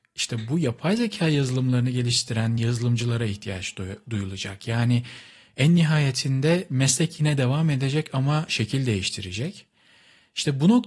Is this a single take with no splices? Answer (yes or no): yes